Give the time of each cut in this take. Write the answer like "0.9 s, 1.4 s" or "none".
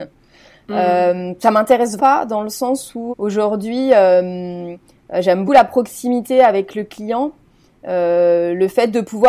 2.0 s, 3.1 s, 5.5 s

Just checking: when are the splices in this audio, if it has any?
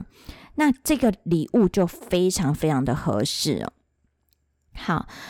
none

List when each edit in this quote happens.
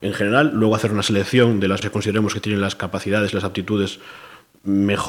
1.8 s

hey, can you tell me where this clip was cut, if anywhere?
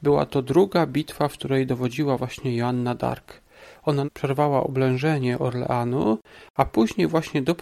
4.0 s

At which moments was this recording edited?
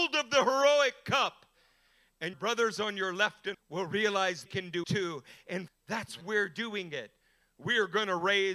2.3 s, 3.5 s, 4.5 s, 4.8 s, 5.7 s, 6.2 s

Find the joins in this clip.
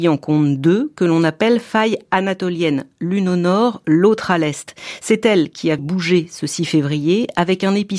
5.8 s

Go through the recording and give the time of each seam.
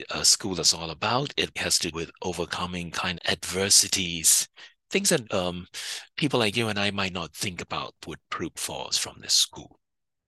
1.6 s, 1.9 s, 3.1 s, 5.2 s, 6.1 s, 8.0 s, 8.5 s, 8.9 s

